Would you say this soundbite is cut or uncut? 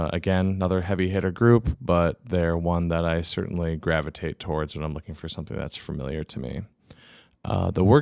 uncut